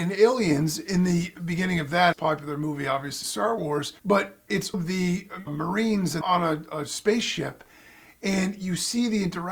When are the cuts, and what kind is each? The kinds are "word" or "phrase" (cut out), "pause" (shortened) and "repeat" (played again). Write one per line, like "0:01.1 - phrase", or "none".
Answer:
0:02.1 - phrase
0:03.2 - word
0:04.0 - pause
0:04.7 - word
0:05.5 - word
0:06.2 - word

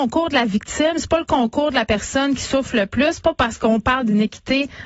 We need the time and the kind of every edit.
none

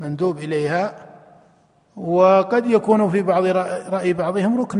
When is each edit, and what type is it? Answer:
none

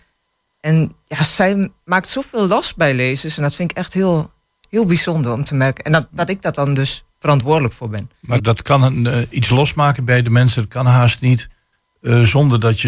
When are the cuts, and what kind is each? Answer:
0:08.4 - word

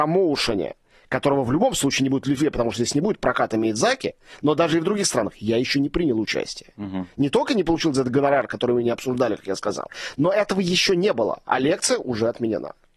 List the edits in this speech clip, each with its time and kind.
none

